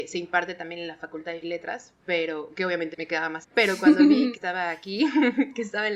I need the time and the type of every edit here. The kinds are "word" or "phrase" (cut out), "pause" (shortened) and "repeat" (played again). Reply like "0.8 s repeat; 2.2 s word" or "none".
1.4 s word; 2.9 s word; 3.4 s word; 4.3 s word